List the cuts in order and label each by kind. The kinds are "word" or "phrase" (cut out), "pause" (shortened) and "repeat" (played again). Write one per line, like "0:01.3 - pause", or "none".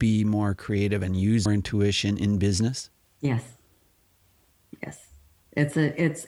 0:01.5 - word

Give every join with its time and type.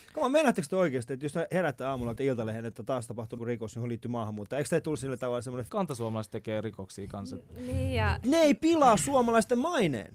0:02.2 - word
0:03.4 - word
0:05.7 - phrase
0:08.2 - word

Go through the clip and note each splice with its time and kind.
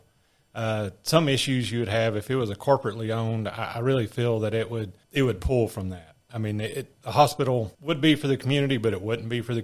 0:05.0 - pause
0:07.7 - pause

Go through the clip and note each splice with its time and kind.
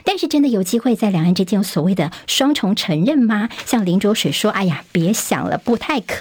none

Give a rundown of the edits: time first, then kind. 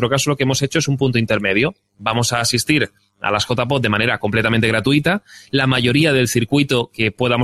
none

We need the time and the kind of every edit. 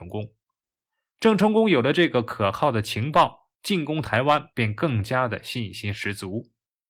0:04.5 - pause

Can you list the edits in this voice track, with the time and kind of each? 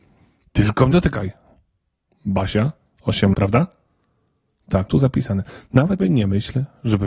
0:00.9 - word
0:03.3 - word
0:04.9 - word
0:06.0 - word

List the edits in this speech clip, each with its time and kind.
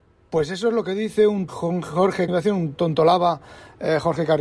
0:01.5 - word
0:02.3 - word

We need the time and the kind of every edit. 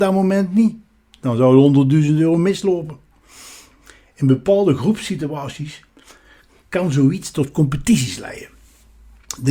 none

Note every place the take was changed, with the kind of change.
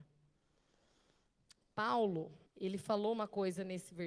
0:02.5 - pause

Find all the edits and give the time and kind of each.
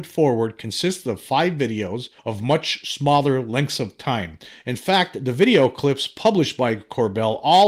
0:02.2 - pause

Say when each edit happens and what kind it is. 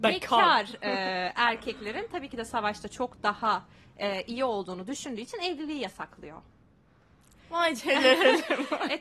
none

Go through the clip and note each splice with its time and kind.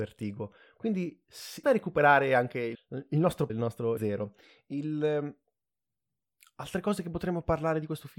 0:01.6 - word
0:02.7 - word
0:03.5 - word
0:04.0 - word

